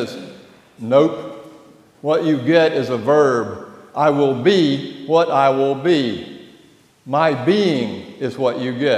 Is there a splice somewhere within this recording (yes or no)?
no